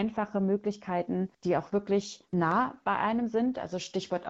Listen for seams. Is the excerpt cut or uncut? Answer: cut